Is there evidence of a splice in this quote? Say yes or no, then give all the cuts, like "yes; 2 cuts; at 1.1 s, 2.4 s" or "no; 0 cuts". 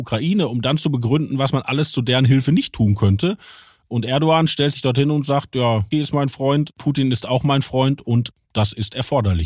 yes; 1 cut; at 5.9 s